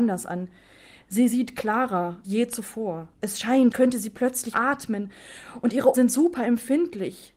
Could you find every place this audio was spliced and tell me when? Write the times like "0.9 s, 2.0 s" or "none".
2.2 s, 3.1 s, 3.7 s, 4.5 s, 5.9 s